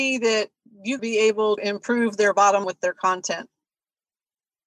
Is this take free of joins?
no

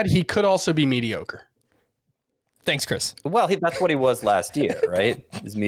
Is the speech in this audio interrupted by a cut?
no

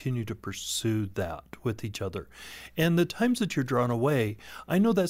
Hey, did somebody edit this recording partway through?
no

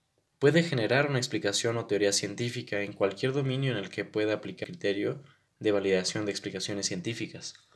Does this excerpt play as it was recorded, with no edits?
no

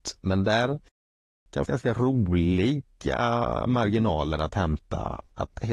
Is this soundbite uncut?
no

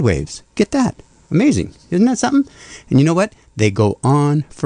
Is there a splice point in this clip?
no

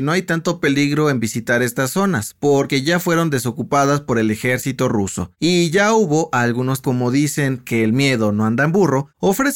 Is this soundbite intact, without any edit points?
no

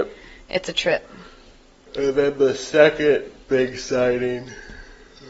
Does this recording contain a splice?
no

